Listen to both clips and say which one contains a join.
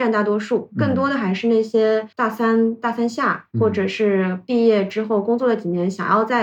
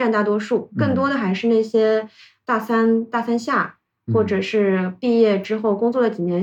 first; 2 cuts; at 2.1 s, 3.5 s

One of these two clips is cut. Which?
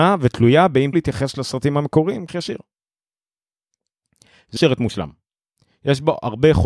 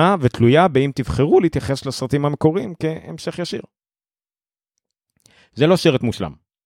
first; 3 cuts; at 0.9 s, 2.3 s, 4.6 s

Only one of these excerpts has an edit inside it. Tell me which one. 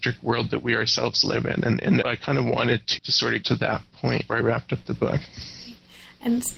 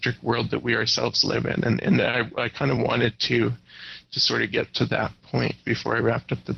first; 4 cuts; at 2.0 s, 3.0 s, 3.4 s, 4.3 s

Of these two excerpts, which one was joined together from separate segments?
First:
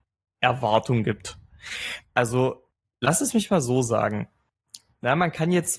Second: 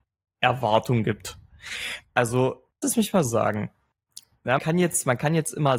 second; 3 cuts; at 2.8 s, 3.2 s, 4.6 s

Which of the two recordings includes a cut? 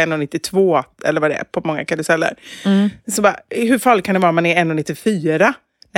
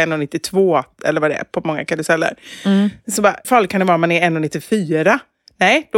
second; 1 cut; at 3.4 s

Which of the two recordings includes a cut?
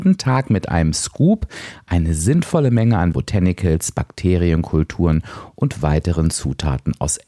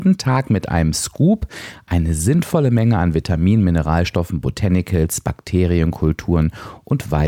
first; 1 cut; at 3.1 s

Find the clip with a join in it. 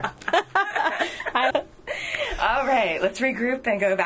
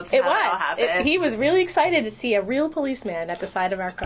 first; 1 cut; at 1.5 s

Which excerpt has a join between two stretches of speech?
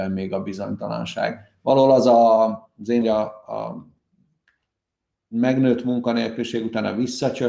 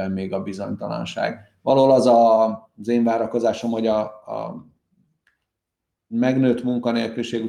first; 1 cut; at 3.0 s

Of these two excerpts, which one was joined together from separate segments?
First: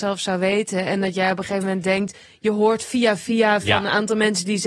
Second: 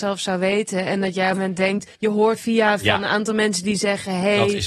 second; 3 cuts; at 1.3 s, 1.9 s, 2.4 s

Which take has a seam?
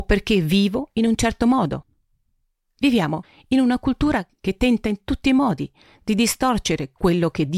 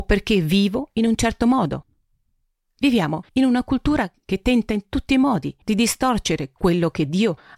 second; 2 cuts; at 3.3 s, 5.6 s

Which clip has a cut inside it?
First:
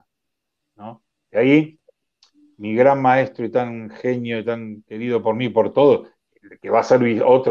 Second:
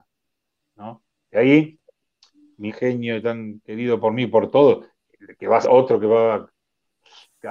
second; 2 cuts; at 2.7 s, 5.6 s

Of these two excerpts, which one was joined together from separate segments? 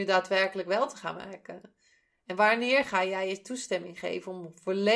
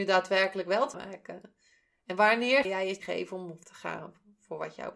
second; 4 cuts; at 0.9 s, 2.6 s, 3.0 s, 3.6 s

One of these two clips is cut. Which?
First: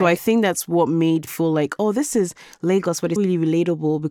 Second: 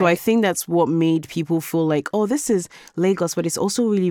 first; 2 cuts; at 1.3 s, 3.2 s

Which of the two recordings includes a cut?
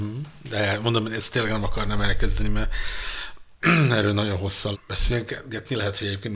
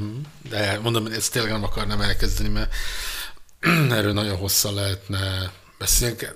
first; 1 cut; at 4.7 s

